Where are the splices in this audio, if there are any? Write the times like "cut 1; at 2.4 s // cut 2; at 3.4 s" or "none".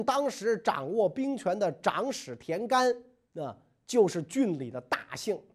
none